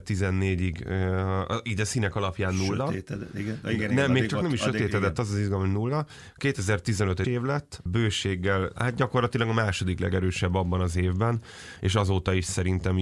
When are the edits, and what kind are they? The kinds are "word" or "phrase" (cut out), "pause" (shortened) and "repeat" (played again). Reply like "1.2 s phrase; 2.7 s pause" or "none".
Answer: 7.2 s phrase